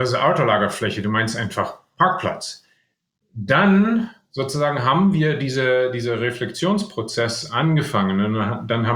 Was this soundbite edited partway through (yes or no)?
no